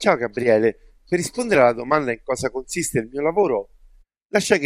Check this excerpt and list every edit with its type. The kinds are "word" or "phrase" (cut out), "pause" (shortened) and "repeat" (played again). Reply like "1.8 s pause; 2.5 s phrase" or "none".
none